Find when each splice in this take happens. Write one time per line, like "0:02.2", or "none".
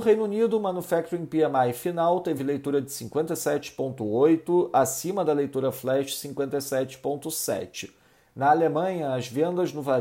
none